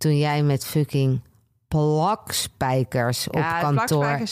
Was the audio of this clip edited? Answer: no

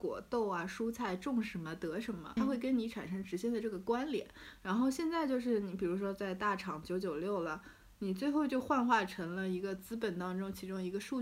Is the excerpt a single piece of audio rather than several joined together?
no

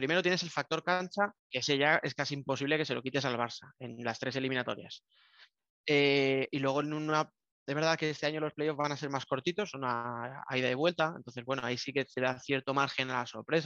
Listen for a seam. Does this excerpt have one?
yes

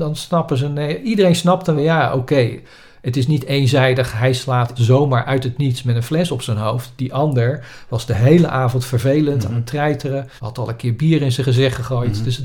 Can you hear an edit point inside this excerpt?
yes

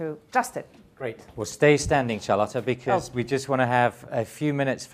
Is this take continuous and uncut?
yes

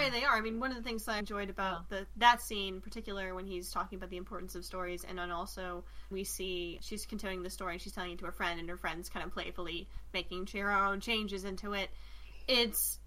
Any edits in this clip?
yes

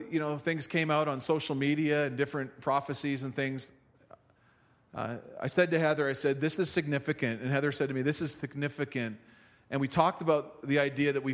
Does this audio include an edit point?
no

